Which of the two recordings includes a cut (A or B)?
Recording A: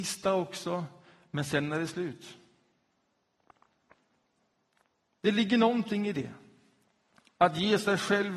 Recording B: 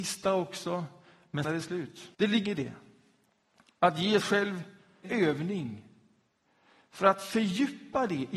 B